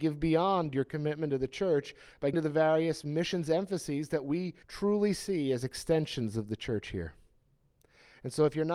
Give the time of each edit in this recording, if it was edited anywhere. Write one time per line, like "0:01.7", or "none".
0:02.3
0:04.6